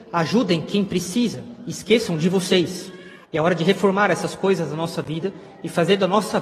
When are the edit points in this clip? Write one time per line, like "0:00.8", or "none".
0:03.2